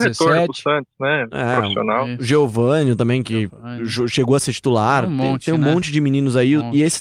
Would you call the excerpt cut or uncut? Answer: uncut